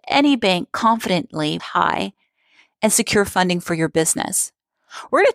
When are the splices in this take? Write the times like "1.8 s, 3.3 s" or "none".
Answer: 1.6 s